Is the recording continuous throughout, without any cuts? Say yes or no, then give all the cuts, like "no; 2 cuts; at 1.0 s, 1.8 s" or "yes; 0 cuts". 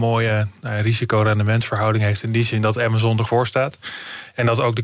no; 1 cut; at 3.3 s